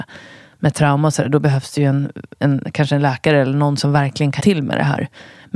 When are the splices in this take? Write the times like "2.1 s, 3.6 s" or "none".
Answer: 4.4 s